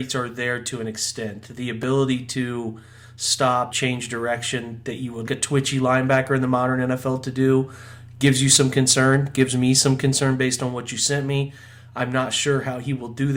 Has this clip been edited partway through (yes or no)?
yes